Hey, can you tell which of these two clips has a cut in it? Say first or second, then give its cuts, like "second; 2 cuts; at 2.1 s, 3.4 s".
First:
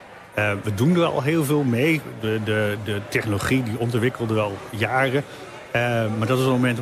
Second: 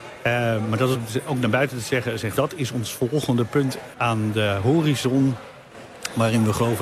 second; 4 cuts; at 0.9 s, 1.3 s, 2.4 s, 3.9 s